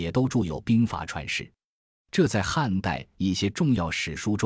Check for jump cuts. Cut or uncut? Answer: uncut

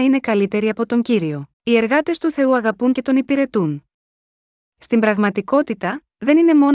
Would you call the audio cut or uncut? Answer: cut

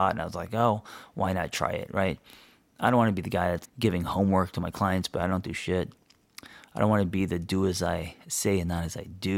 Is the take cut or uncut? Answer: cut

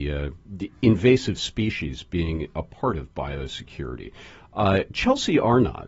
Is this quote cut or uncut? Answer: uncut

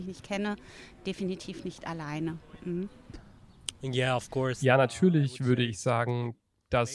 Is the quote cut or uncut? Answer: uncut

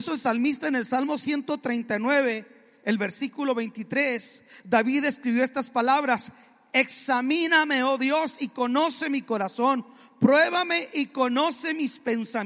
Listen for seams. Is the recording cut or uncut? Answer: uncut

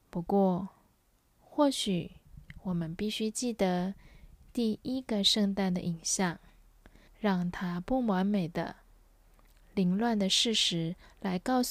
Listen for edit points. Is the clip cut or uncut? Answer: cut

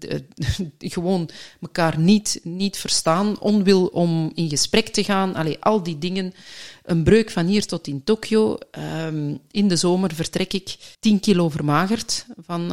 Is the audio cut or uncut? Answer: cut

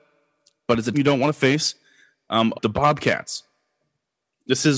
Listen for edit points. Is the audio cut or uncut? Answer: cut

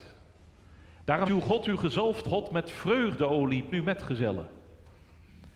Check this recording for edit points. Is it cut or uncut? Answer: cut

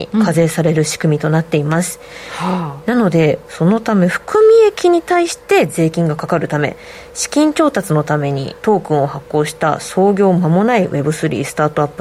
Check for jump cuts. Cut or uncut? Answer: cut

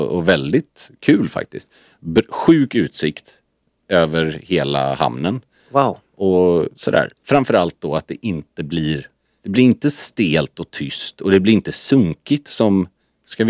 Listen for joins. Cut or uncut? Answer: uncut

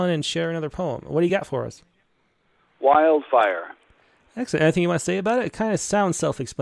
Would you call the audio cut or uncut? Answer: uncut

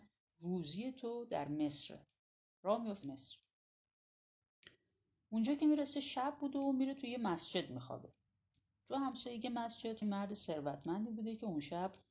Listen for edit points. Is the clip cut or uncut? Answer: cut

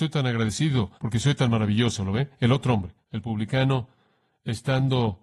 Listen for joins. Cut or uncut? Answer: cut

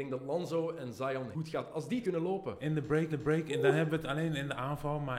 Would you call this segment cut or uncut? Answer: cut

